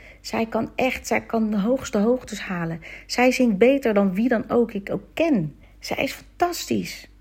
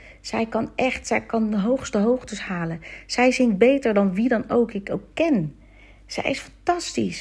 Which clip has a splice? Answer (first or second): first